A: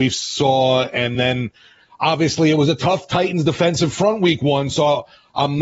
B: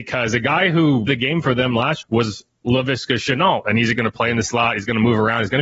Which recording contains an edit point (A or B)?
B